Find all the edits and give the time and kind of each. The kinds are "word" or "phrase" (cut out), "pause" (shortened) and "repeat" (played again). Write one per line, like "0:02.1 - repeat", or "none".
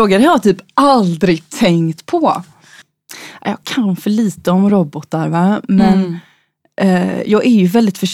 none